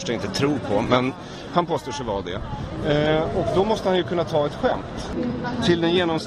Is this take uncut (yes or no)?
yes